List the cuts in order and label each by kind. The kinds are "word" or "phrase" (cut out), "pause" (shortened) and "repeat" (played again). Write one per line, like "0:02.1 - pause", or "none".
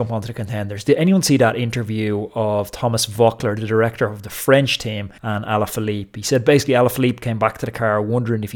0:05.2 - pause